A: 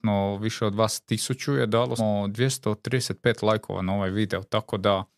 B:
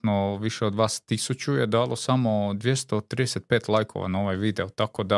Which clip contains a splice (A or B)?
A